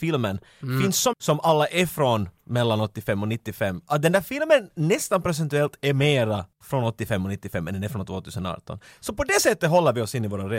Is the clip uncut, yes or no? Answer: no